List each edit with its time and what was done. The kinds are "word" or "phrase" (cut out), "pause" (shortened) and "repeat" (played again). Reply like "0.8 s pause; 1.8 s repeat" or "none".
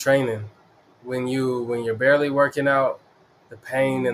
none